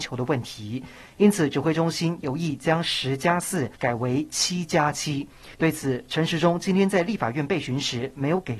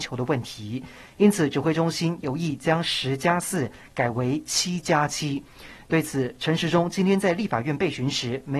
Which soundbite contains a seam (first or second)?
first